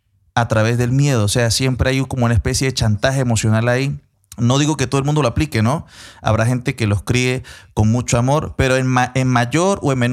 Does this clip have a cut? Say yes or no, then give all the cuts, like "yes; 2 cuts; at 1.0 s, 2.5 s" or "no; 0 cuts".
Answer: yes; 1 cut; at 4.1 s